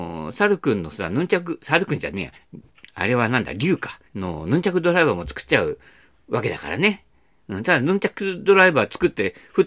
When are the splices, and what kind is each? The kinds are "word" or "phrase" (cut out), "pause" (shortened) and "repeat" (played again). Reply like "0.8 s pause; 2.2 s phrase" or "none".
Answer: 2.4 s pause; 4.1 s pause